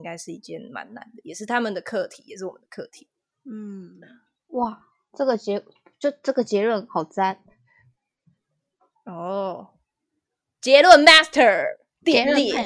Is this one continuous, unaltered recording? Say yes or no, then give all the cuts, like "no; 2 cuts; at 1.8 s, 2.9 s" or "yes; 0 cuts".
yes; 0 cuts